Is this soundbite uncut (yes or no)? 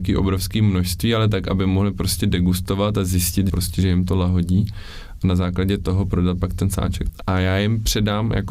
yes